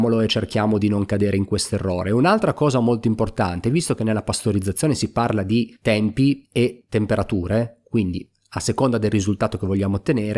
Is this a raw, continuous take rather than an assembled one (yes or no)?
yes